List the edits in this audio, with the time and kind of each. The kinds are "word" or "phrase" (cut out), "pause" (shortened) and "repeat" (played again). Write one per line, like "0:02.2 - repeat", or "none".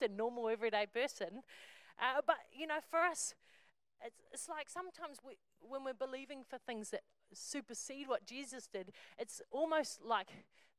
none